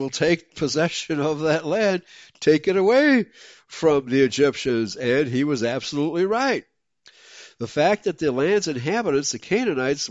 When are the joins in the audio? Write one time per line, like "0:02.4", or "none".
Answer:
none